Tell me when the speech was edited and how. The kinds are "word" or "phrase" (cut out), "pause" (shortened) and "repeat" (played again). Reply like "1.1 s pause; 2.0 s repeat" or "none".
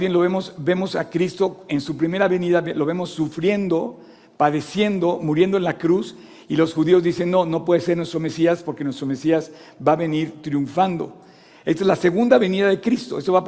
none

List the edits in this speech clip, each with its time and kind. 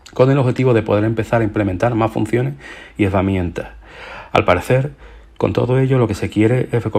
none

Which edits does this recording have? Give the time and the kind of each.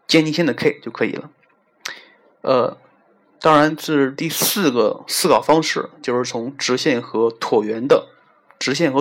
none

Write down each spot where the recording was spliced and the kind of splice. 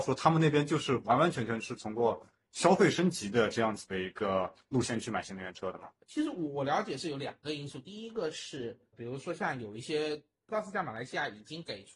8.9 s word

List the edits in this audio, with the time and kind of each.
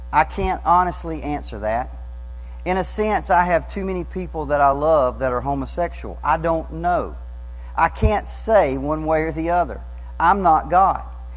none

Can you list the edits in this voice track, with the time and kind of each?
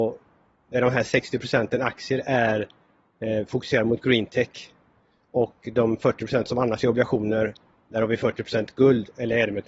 none

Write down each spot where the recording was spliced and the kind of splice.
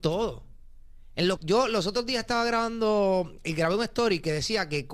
1.4 s word

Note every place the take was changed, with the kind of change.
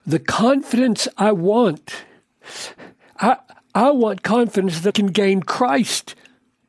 4.9 s word

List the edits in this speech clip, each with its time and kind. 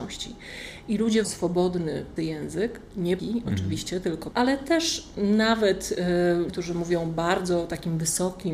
1.2 s word; 2.2 s word; 3.2 s word; 4.3 s word; 6.5 s word

